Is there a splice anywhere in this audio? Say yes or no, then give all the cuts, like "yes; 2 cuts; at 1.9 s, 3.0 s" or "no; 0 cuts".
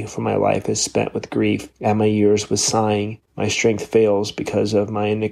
yes; 2 cuts; at 1.7 s, 3.3 s